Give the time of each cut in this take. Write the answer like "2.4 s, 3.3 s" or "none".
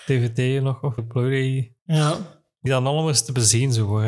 1.0 s, 1.8 s, 2.7 s